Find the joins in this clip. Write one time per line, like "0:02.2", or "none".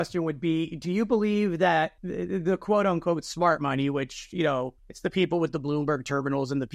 0:02.0
0:04.8